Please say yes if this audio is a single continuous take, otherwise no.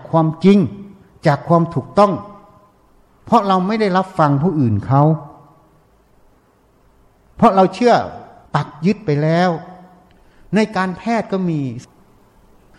yes